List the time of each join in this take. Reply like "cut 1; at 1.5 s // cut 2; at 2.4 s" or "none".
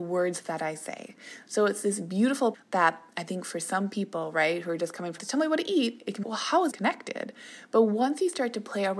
cut 1; at 2.5 s // cut 2; at 5.2 s // cut 3; at 6.2 s // cut 4; at 6.7 s